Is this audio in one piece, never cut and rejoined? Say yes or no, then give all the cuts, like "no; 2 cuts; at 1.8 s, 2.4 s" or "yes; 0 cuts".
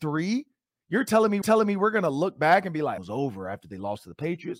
no; 2 cuts; at 1.4 s, 3.0 s